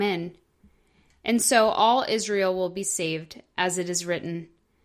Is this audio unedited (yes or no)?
yes